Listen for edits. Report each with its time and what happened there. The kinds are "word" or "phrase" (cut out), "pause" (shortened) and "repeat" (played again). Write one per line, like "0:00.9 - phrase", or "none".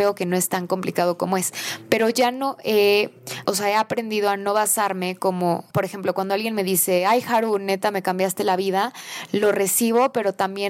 0:03.4 - word
0:05.7 - phrase